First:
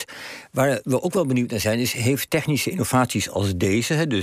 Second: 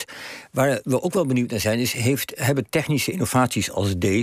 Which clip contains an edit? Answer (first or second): first